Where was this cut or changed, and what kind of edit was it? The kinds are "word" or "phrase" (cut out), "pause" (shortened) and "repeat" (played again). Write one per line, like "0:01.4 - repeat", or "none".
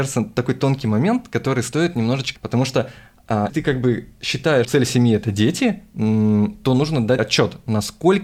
0:02.4 - word
0:03.5 - word
0:04.6 - word
0:07.2 - word